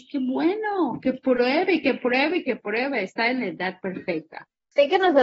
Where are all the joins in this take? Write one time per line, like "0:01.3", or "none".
none

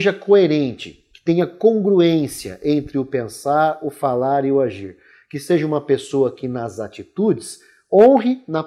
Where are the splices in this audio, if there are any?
none

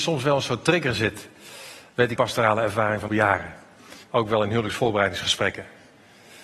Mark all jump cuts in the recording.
0:02.2
0:03.1
0:04.0

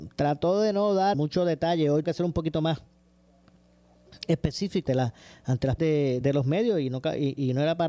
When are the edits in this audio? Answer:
0:01.1
0:02.0
0:04.9
0:05.8
0:06.2

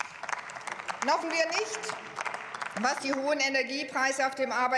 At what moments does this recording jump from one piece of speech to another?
0:01.2
0:03.0

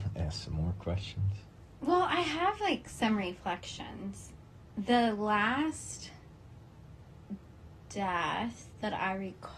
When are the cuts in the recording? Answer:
0:04.7

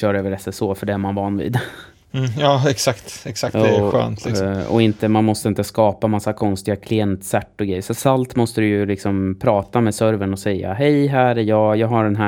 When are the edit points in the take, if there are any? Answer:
none

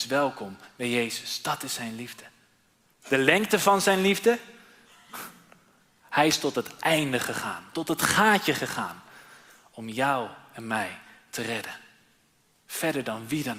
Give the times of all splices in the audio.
none

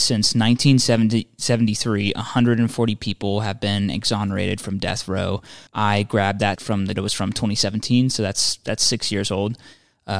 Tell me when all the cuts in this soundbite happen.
0:05.7
0:06.6
0:07.0

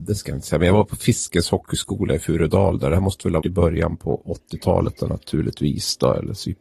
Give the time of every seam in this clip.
0:03.4

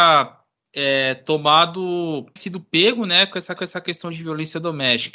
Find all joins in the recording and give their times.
0:02.4
0:03.6

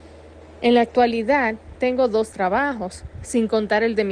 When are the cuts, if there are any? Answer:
none

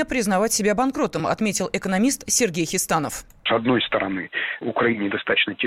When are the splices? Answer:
none

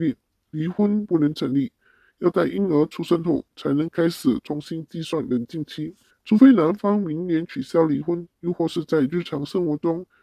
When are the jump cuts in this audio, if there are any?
0:06.1

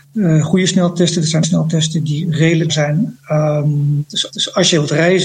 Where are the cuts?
0:01.4
0:02.7
0:04.3

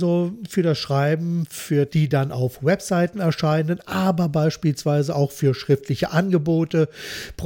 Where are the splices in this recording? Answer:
0:01.9

